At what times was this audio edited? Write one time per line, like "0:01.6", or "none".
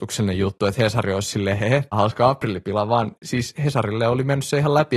0:01.9